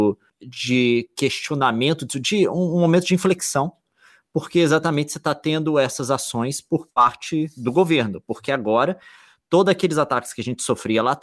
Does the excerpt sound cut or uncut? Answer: uncut